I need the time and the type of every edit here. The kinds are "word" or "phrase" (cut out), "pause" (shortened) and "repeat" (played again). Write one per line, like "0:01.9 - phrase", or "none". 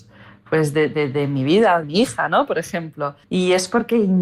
0:01.8 - phrase
0:03.2 - pause

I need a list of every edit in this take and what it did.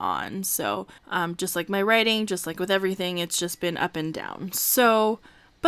0:01.0 - pause

